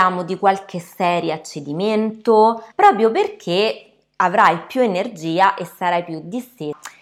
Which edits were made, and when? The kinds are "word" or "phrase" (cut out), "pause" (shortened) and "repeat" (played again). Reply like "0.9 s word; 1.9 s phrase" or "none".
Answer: 2.7 s pause